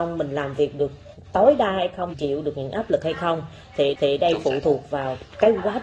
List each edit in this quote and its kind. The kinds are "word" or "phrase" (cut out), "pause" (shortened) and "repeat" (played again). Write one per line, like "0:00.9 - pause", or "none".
0:02.1 - word
0:04.0 - repeat

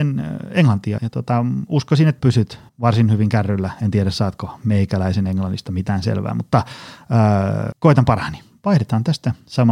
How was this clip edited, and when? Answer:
0:01.0 - word
0:02.2 - word
0:02.7 - pause
0:07.7 - word

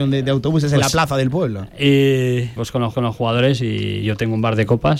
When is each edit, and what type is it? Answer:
0:02.6 - word
0:02.9 - repeat

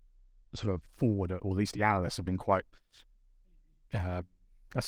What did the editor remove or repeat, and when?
none

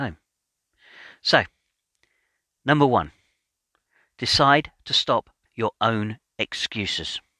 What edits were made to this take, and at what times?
0:05.4 - word

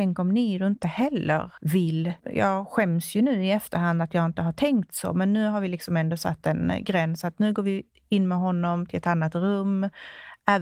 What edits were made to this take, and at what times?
0:02.2 - pause

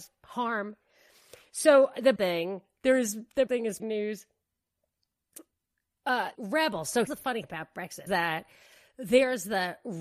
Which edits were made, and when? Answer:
0:02.2 - word
0:03.5 - word
0:03.8 - word
0:06.3 - word
0:07.1 - word
0:07.4 - word
0:08.1 - word

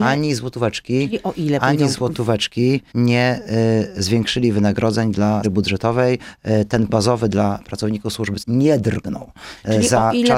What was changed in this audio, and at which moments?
0:02.9 - pause
0:05.4 - word
0:06.9 - word
0:08.4 - word

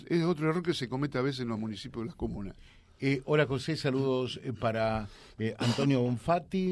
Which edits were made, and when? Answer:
none

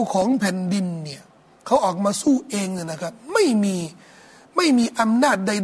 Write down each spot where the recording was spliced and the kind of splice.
none

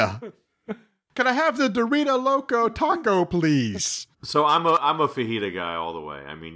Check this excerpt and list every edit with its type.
0:04.1 - pause

